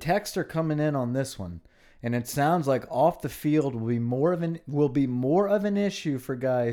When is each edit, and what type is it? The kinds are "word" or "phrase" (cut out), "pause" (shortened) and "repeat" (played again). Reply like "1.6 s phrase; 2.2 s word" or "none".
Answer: none